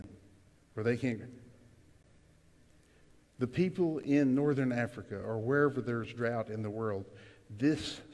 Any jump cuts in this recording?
no; 0 cuts

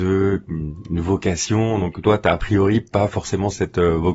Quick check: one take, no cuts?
yes; 0 cuts

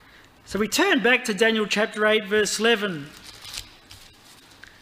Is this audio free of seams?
yes; 0 cuts

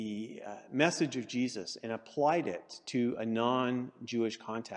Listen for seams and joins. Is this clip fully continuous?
yes; 0 cuts

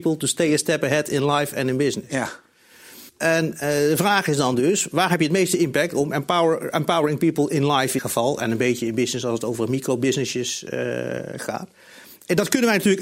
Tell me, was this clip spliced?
yes; 2 cuts; at 3.1 s, 8.0 s

